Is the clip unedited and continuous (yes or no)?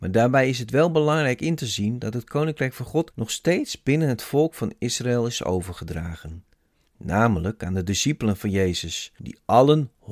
yes